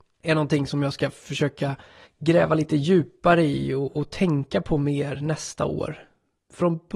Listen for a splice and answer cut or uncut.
cut